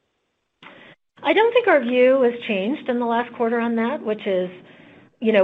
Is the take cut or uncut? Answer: uncut